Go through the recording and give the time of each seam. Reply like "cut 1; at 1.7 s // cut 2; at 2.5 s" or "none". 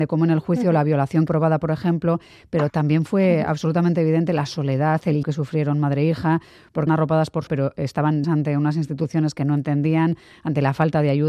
cut 1; at 1.3 s // cut 2; at 2.7 s // cut 3; at 5.2 s // cut 4; at 6.9 s // cut 5; at 7.5 s // cut 6; at 8.2 s